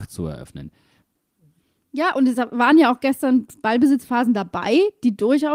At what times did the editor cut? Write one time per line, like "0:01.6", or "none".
none